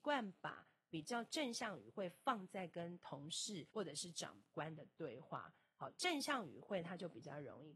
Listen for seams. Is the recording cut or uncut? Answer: cut